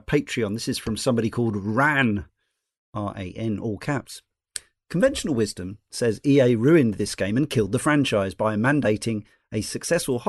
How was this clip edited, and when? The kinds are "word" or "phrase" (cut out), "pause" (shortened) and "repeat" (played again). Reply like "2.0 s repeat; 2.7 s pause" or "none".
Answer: none